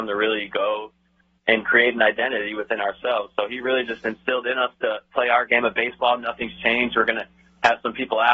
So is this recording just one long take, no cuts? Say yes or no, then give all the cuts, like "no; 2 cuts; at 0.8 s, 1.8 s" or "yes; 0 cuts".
yes; 0 cuts